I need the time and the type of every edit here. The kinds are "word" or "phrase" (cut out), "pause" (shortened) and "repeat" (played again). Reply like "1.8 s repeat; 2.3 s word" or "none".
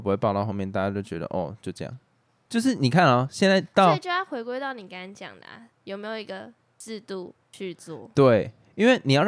none

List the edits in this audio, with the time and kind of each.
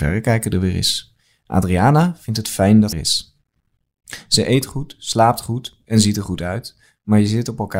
2.9 s word

